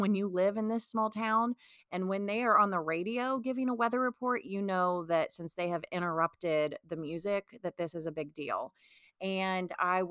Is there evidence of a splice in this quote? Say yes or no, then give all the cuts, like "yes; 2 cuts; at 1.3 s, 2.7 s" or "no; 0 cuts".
no; 0 cuts